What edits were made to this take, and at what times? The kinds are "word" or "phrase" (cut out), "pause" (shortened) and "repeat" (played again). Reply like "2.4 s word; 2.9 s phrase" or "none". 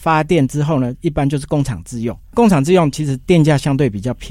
2.2 s pause